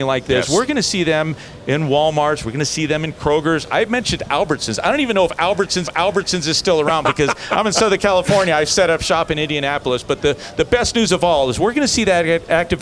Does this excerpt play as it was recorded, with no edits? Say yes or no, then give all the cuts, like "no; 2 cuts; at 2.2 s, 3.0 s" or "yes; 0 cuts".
no; 1 cut; at 5.8 s